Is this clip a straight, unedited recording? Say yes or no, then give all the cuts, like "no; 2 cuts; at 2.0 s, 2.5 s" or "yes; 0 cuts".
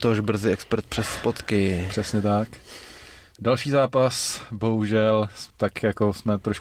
no; 1 cut; at 5.5 s